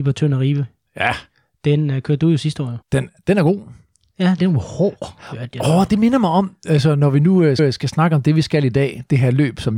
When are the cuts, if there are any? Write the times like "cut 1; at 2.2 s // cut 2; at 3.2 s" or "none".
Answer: cut 1; at 2.8 s // cut 2; at 4.4 s // cut 3; at 7.6 s